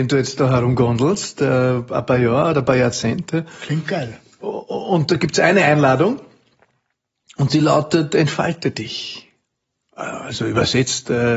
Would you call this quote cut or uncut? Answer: uncut